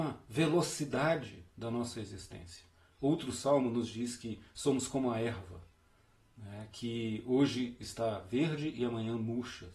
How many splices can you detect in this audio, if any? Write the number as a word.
zero